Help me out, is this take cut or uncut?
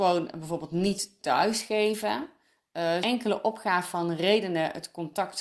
cut